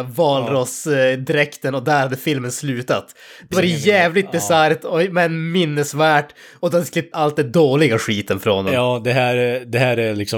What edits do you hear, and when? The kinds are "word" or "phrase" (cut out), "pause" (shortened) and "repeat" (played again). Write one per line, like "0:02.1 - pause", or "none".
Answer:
0:03.5 - word
0:07.1 - word